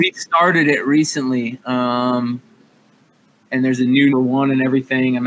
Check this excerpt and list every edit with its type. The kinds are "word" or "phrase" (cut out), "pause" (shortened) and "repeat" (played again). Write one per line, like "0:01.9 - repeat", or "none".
0:04.1 - word